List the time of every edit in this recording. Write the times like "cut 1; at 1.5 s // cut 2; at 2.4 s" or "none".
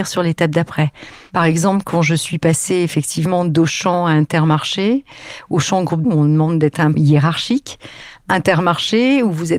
cut 1; at 6.0 s // cut 2; at 6.9 s